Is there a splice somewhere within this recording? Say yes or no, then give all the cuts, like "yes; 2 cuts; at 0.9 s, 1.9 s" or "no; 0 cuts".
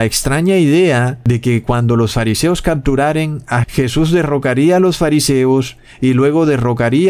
yes; 1 cut; at 3.6 s